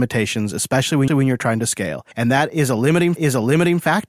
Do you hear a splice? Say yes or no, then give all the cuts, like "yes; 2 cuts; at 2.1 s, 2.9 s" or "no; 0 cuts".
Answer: yes; 3 cuts; at 1.1 s, 2.1 s, 3.2 s